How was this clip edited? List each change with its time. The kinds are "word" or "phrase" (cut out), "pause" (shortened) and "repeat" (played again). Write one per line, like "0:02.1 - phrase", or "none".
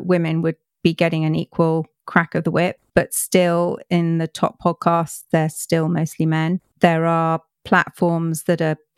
none

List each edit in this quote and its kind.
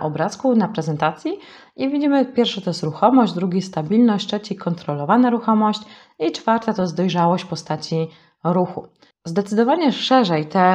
none

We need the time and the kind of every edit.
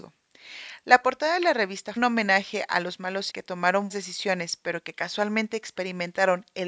0:02.0 - phrase
0:03.3 - word
0:03.9 - word

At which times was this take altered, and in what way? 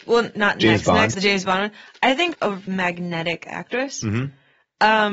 0:01.1 - word
0:02.3 - word
0:02.7 - word

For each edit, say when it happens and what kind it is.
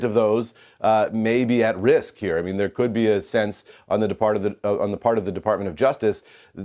none

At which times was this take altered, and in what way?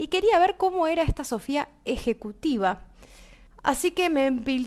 0:03.5 - pause

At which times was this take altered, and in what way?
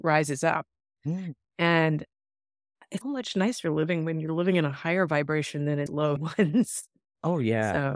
0:03.0 - word
0:05.9 - word
0:06.2 - word

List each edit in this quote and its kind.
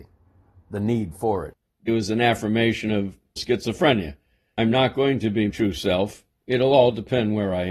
0:01.9 - word
0:03.4 - word
0:05.5 - word

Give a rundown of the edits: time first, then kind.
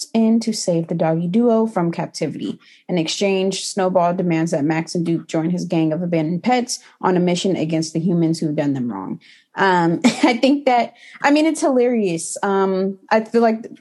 none

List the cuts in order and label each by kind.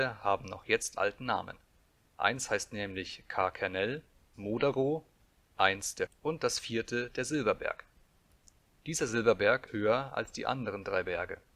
0:01.0 - word
0:04.3 - word
0:06.1 - word
0:09.7 - word

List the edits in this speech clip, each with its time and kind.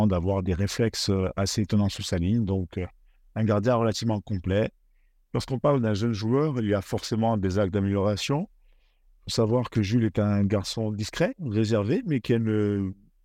none

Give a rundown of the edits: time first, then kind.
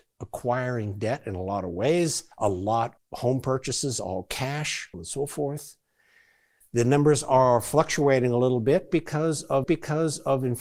0:02.3 - pause
0:03.0 - word
0:04.9 - word
0:09.6 - repeat

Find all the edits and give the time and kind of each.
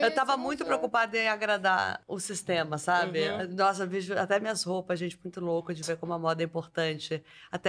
0:02.0 - pause

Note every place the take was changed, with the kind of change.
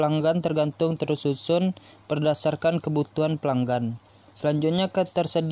0:01.0 - phrase

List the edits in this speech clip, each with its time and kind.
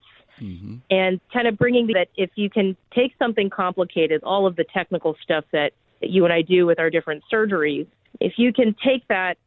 0:01.3 - word
0:01.9 - word
0:04.2 - word

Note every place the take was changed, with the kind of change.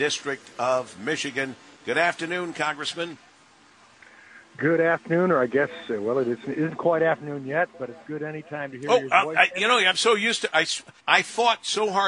0:01.7 - pause
0:11.0 - pause

